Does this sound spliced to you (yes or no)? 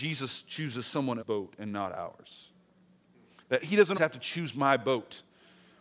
yes